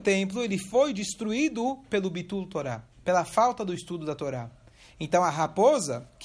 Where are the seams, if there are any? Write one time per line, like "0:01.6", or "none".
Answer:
0:02.9